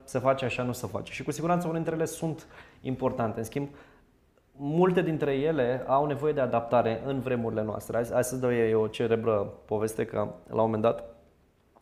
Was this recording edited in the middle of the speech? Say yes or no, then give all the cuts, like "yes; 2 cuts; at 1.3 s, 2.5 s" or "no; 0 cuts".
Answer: no; 0 cuts